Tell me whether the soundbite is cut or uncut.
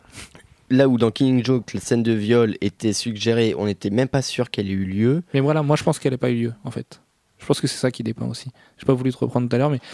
uncut